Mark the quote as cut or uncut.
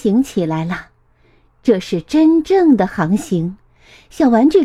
uncut